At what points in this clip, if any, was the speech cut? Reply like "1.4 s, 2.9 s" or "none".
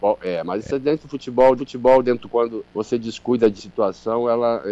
1.6 s, 2.3 s, 2.7 s, 3.6 s

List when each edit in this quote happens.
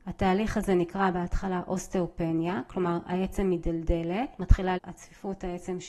4.8 s

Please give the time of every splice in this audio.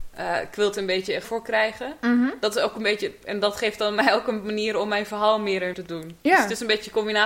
1.2 s, 5.7 s

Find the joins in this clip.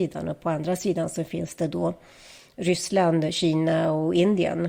none

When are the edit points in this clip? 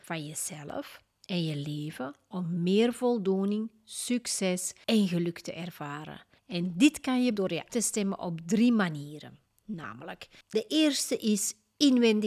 7.4 s, 7.7 s

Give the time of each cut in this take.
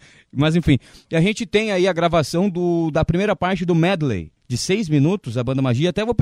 4.4 s

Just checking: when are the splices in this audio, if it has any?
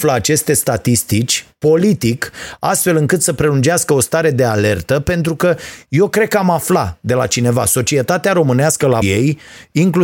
9.0 s

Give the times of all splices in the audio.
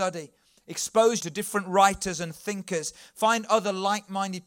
1.2 s

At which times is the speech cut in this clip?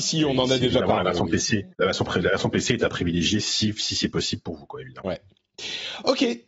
1.7 s

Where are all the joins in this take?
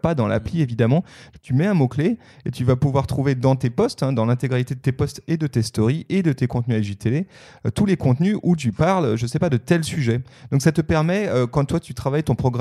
none

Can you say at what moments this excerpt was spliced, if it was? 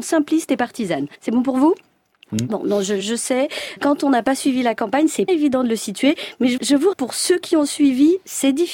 1.1 s, 3.0 s, 3.8 s, 5.3 s, 6.6 s, 6.9 s

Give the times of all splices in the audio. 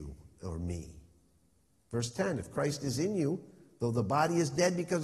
none

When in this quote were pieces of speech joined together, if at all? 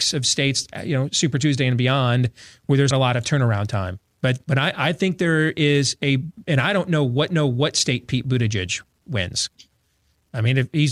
2.9 s, 4.4 s, 7.3 s

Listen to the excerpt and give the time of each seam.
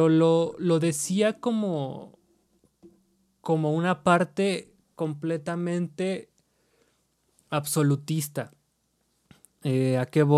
none

